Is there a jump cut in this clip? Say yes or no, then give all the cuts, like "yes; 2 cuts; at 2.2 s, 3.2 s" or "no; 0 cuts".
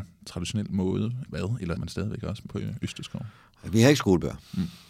yes; 3 cuts; at 1.3 s, 1.8 s, 2.5 s